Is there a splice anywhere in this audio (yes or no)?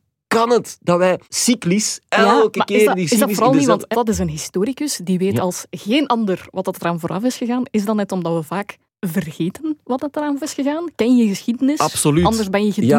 yes